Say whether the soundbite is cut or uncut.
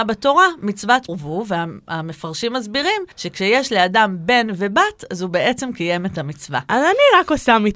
cut